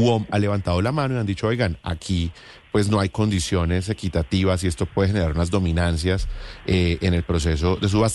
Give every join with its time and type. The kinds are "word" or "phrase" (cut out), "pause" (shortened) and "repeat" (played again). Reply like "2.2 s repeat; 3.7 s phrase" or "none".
none